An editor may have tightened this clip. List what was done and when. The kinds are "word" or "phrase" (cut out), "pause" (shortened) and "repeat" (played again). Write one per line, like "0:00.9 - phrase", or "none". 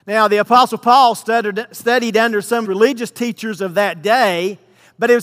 0:02.6 - phrase